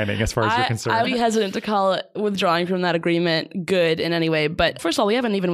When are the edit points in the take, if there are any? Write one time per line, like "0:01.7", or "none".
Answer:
0:01.0